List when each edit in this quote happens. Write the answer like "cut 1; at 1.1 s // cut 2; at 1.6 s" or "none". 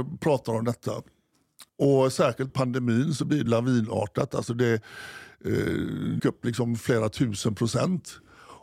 cut 1; at 1.7 s // cut 2; at 2.5 s // cut 3; at 3.5 s // cut 4; at 6.2 s